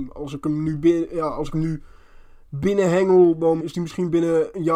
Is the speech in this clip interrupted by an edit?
yes; 1 cut; at 3.6 s

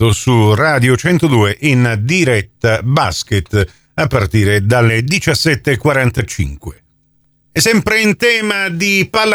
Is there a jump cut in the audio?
no; 0 cuts

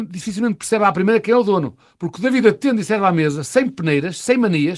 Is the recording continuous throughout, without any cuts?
yes; 0 cuts

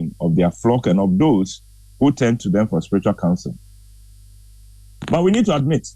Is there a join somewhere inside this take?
no; 0 cuts

